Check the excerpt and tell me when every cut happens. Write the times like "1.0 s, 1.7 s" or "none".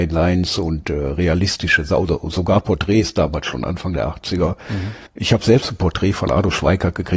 5.1 s